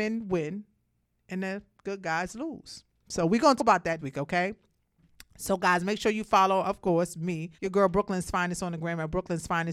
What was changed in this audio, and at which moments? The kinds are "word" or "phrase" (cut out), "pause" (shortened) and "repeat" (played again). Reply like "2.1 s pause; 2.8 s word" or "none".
3.6 s word; 4.0 s word; 7.5 s pause

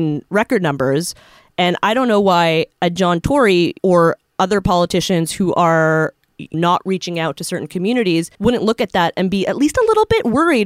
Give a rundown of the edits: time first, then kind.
3.8 s pause; 6.5 s word; 8.3 s pause

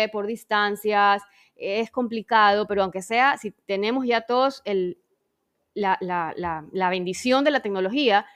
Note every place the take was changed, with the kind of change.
none

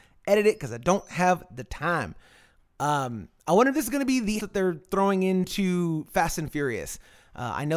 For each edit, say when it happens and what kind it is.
4.4 s word

